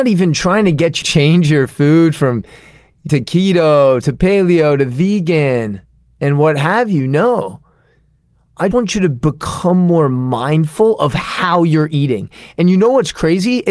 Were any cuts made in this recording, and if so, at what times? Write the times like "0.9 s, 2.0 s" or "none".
1.0 s, 3.1 s, 8.7 s

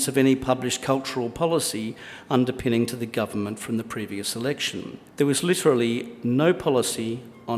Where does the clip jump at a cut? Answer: 5.1 s

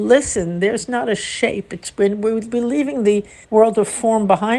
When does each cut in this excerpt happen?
3.4 s

